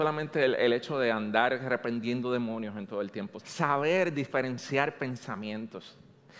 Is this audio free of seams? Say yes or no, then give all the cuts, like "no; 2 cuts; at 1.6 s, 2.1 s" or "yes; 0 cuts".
no; 1 cut; at 3.4 s